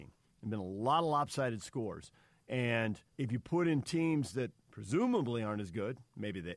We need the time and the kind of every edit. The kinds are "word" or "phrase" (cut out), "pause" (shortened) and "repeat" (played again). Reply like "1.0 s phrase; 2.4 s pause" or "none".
3.1 s pause